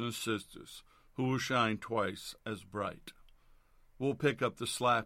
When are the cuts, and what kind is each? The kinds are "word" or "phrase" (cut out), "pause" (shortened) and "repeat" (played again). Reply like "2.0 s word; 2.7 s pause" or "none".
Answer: none